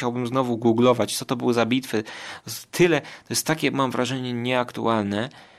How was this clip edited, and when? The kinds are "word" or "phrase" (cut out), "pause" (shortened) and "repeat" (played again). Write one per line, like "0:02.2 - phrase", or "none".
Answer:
none